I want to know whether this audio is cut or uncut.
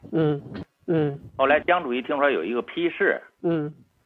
uncut